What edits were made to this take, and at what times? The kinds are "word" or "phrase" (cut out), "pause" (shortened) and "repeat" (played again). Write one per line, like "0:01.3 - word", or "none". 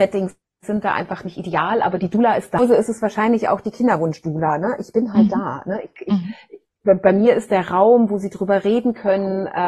none

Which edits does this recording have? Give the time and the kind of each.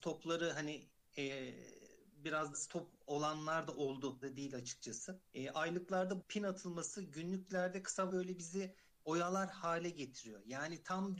0:02.5 - word
0:04.2 - word
0:05.3 - pause
0:06.2 - word
0:08.1 - word

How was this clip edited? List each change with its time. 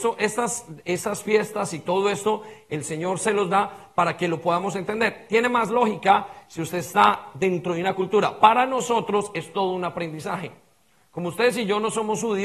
none

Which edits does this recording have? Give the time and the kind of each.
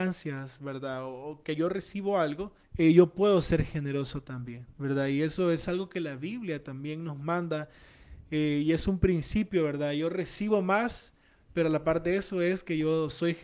0:02.6 - pause

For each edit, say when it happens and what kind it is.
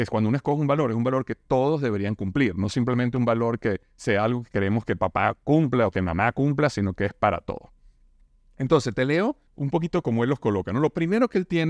0:09.5 - pause

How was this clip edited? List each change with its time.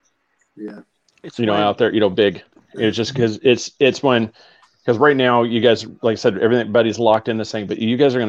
none

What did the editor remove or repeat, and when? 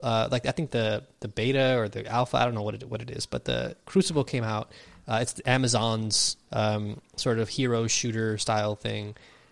none

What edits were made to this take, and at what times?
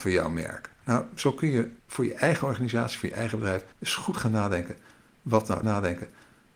0:01.8 - pause
0:03.7 - pause
0:05.6 - repeat

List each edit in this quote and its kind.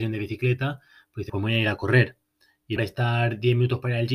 0:01.3 - word
0:02.8 - word

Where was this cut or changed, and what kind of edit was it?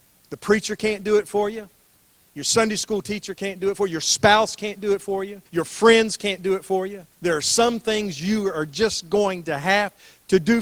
0:05.5 - pause
0:07.1 - pause

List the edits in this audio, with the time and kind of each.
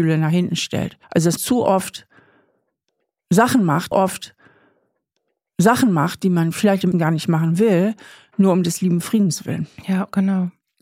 0:01.0 - pause
0:01.4 - word
0:03.9 - repeat
0:06.9 - word

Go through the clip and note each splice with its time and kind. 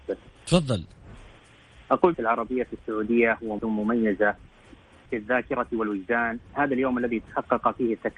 0:02.1 - phrase
0:03.6 - word
0:05.1 - word

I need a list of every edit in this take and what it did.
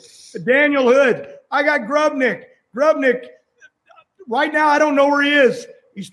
none

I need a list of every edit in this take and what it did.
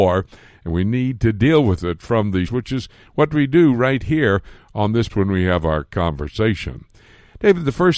0:02.5 - word
0:05.1 - word

